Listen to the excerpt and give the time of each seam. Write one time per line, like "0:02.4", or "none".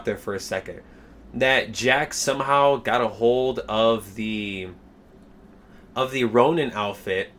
none